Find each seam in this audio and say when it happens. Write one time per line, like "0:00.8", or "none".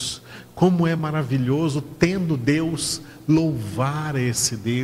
none